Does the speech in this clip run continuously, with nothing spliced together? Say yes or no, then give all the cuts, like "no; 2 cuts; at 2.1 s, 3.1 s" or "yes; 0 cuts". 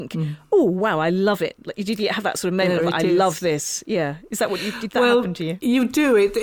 yes; 0 cuts